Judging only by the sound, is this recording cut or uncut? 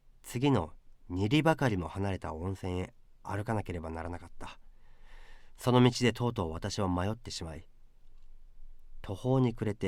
uncut